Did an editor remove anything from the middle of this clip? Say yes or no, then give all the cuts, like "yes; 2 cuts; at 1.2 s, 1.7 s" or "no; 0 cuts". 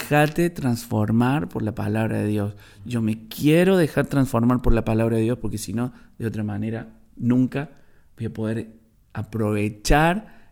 no; 0 cuts